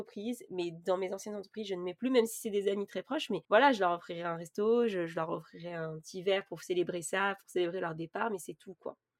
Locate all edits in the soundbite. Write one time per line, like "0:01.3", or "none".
0:03.4

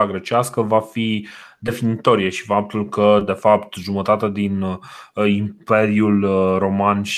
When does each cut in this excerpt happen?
none

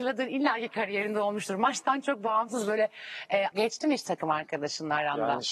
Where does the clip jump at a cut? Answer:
0:03.5

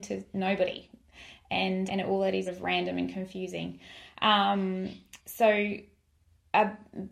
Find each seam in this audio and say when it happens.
0:01.9
0:02.5
0:05.2

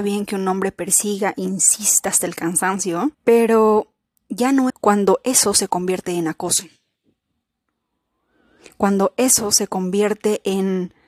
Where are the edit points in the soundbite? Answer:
0:03.1
0:04.7

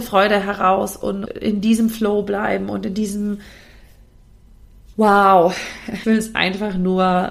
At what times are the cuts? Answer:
0:01.3
0:06.0

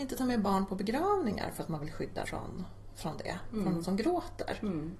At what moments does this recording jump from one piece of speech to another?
0:02.2
0:03.8

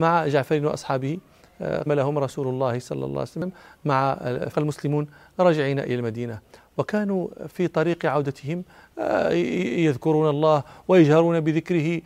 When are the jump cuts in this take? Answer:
0:01.9
0:04.5

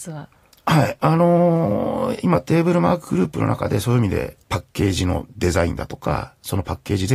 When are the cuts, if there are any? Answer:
0:04.4

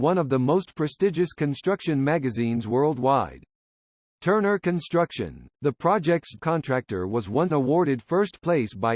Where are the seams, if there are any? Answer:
0:06.4
0:07.5

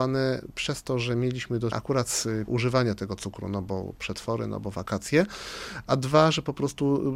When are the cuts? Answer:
0:01.7
0:02.5

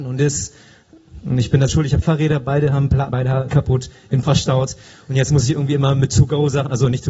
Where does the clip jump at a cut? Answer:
0:01.7
0:02.0
0:03.1
0:03.5
0:04.2

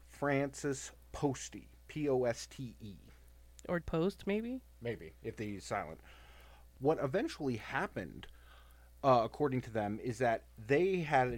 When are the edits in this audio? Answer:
0:03.8

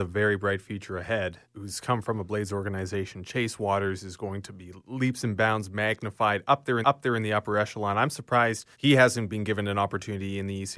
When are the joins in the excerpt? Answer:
0:01.4
0:06.8
0:08.7

